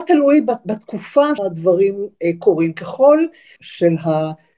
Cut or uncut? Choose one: cut